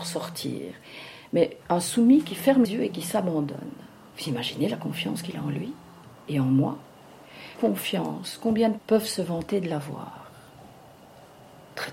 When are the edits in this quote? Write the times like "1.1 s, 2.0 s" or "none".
1.6 s, 2.6 s, 4.1 s, 7.6 s, 8.8 s